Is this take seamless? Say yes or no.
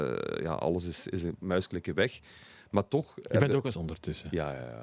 no